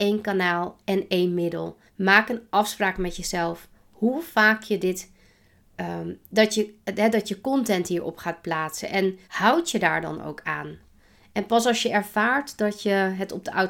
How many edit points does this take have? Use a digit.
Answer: 2